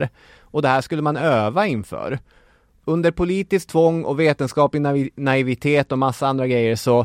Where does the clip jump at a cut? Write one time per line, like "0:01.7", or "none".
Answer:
none